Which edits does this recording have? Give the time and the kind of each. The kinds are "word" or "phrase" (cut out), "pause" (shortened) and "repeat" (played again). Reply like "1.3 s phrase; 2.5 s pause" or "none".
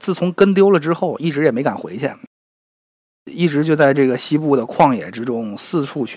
none